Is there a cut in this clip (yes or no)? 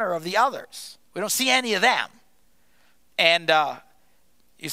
yes